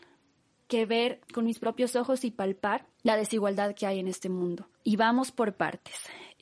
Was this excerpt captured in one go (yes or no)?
no